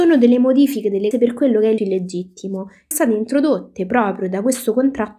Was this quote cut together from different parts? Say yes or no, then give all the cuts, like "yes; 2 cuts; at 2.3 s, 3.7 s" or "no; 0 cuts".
yes; 3 cuts; at 1.1 s, 1.8 s, 2.9 s